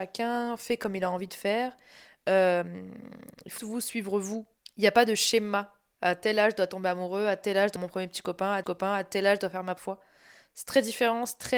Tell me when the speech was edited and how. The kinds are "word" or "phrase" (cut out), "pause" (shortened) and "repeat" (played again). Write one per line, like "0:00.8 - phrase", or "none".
0:03.6 - word
0:07.8 - word
0:08.6 - repeat
0:09.8 - word